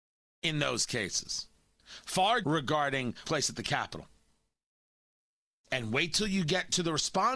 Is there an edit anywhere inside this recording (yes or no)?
yes